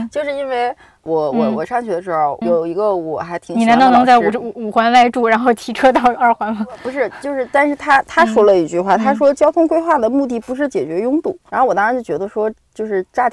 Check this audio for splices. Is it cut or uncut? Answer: cut